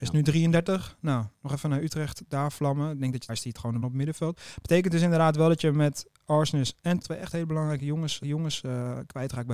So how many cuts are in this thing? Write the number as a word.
four